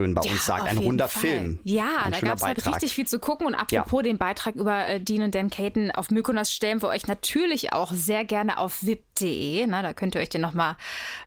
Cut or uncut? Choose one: uncut